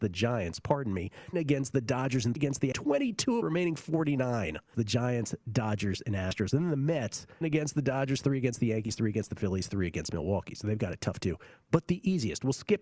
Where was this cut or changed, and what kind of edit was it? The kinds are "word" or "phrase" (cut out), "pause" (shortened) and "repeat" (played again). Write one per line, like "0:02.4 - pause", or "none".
0:01.3 - word
0:02.4 - word
0:02.7 - word
0:03.4 - word
0:04.7 - word
0:07.4 - word